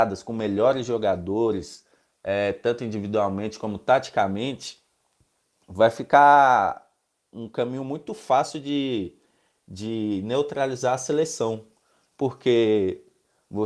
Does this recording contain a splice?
no; 0 cuts

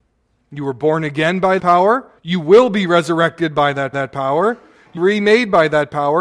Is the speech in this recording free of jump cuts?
no; 4 cuts; at 1.6 s, 2.2 s, 3.9 s, 5.0 s

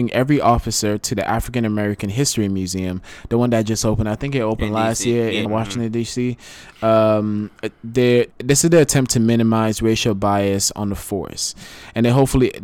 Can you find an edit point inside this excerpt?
yes; 2 cuts; at 5.5 s, 8.3 s

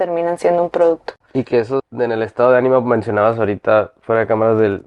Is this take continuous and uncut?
no; 1 cut; at 1.8 s

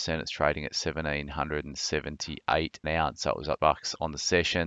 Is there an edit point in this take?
yes; 2 cuts; at 2.8 s, 3.6 s

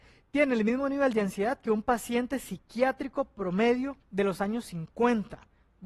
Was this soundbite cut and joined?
yes; 1 cut; at 4.0 s

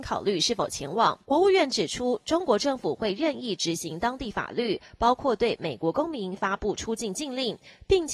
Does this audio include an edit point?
yes; 1 cut; at 1.2 s

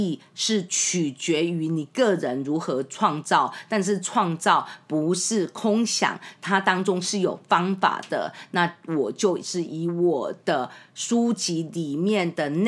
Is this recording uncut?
yes; 0 cuts

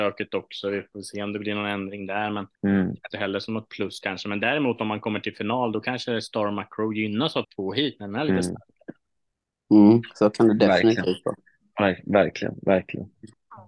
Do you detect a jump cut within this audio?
yes; 3 cuts; at 2.5 s, 3.1 s, 7.4 s

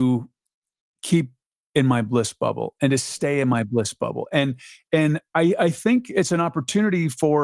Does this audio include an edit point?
no; 0 cuts

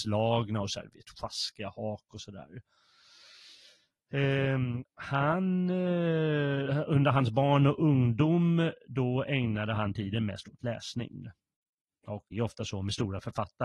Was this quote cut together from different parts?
yes; 2 cuts; at 4.8 s, 12.3 s

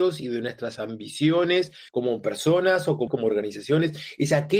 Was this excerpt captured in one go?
no; 2 cuts; at 1.9 s, 3.1 s

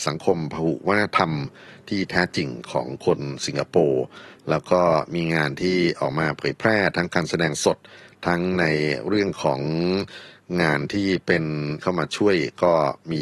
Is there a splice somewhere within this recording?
yes; 1 cut; at 11.8 s

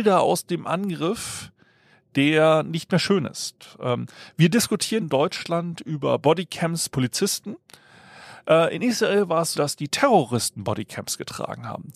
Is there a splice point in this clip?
yes; 3 cuts; at 5.0 s, 6.9 s, 9.5 s

